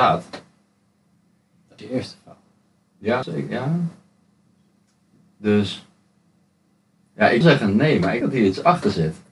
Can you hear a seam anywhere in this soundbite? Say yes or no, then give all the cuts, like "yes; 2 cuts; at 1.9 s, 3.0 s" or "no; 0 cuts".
yes; 4 cuts; at 1.8 s, 3.2 s, 7.4 s, 8.2 s